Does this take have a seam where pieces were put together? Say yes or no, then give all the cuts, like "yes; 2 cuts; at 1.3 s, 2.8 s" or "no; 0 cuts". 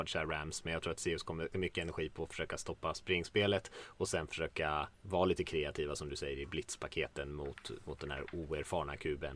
yes; 2 cuts; at 1.5 s, 4.9 s